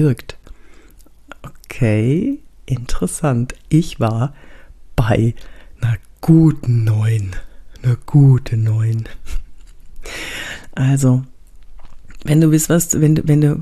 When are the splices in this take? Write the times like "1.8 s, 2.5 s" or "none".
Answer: none